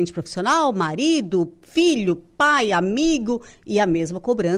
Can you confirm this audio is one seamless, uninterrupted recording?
yes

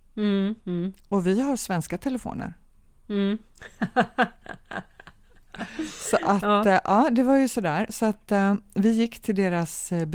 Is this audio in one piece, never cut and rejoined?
yes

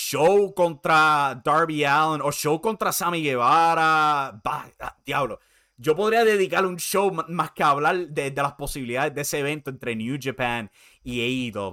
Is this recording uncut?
yes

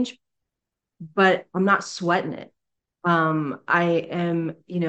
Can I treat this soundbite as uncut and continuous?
yes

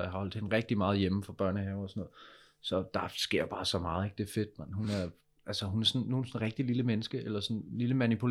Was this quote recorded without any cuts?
yes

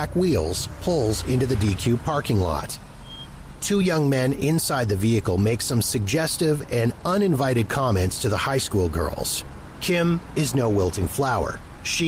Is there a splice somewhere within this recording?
no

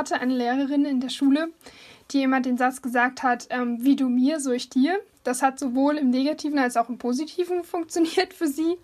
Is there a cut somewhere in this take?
no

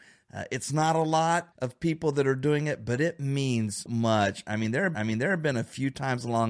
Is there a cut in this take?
yes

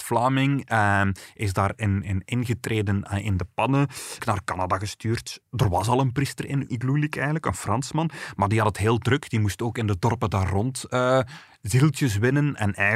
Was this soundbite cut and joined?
yes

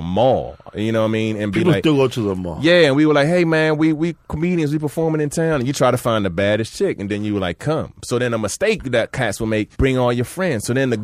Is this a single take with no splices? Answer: no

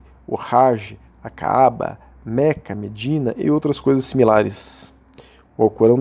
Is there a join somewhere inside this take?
no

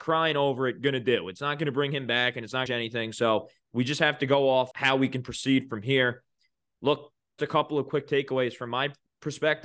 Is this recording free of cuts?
no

